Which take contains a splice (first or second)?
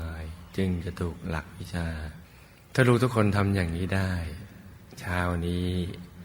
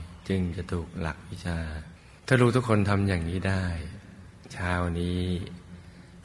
second